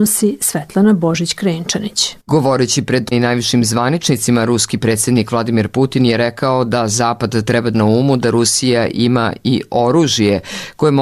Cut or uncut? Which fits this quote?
cut